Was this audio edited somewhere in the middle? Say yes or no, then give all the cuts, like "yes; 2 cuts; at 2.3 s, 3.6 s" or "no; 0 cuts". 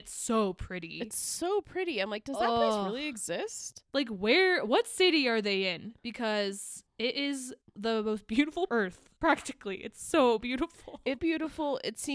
yes; 5 cuts; at 3.8 s, 7.6 s, 8.7 s, 9.2 s, 11.2 s